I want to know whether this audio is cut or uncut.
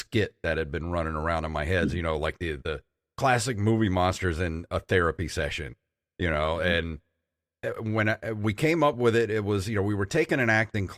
uncut